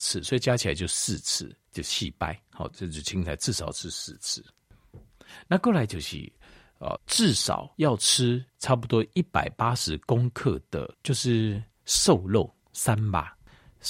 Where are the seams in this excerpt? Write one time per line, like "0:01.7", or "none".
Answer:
0:01.7
0:07.0
0:07.7
0:08.5
0:10.9